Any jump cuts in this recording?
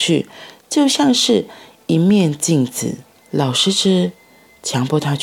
yes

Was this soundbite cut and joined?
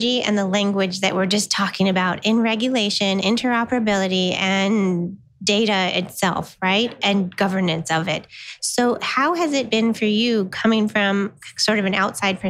yes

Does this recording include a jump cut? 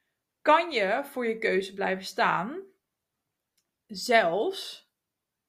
no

